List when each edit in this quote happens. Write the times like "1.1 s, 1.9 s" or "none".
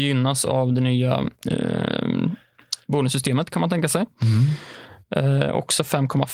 none